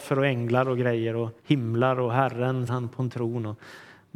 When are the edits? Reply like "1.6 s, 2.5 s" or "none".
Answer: 1.4 s, 2.7 s